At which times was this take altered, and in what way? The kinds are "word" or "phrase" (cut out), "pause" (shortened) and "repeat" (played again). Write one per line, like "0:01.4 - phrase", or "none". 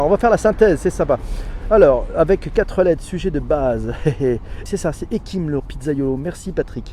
0:04.7 - word
0:05.6 - word